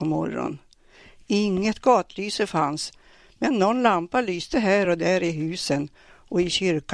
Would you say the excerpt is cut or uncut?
uncut